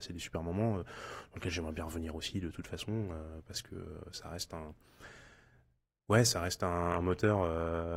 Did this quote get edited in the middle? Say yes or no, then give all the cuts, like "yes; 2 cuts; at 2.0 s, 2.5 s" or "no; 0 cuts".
no; 0 cuts